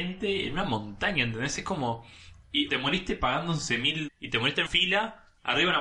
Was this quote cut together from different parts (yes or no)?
yes